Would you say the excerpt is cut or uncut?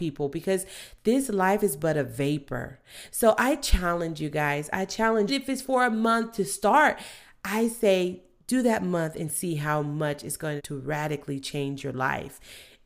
cut